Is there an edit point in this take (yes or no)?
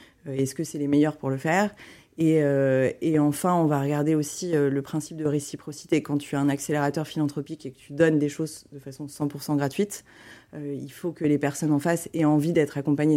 no